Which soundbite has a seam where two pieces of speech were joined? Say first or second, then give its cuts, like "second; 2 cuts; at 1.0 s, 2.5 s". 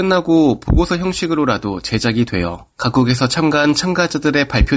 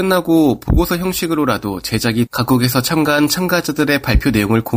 second; 1 cut; at 2.3 s